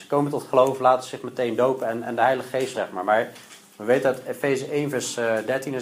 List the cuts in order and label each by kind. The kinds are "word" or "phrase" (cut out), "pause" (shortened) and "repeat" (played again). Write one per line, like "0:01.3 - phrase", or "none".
0:02.7 - phrase